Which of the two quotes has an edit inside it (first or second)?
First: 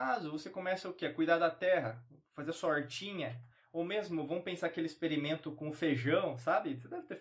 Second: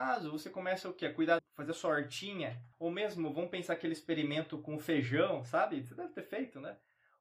second